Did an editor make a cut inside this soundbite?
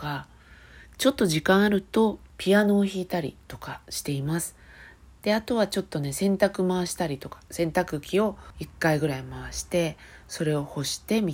no; 0 cuts

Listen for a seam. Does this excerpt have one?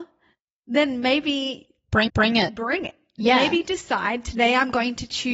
yes; 1 cut; at 2.1 s

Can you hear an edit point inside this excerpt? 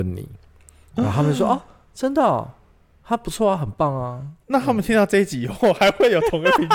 no; 0 cuts

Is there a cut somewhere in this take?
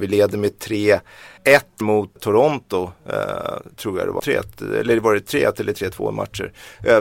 yes; 5 cuts; at 1.4 s, 1.8 s, 2.2 s, 3.7 s, 4.2 s

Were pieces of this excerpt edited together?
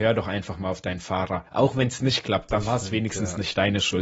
no; 0 cuts

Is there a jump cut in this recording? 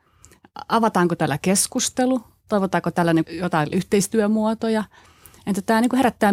yes; 2 cuts; at 3.2 s, 3.7 s

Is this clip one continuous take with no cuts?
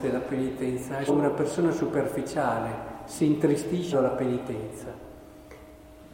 no; 2 cuts; at 1.1 s, 3.9 s

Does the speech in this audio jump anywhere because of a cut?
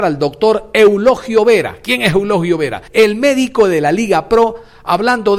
yes; 1 cut; at 2.9 s

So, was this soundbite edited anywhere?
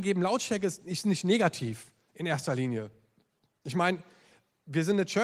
no; 0 cuts

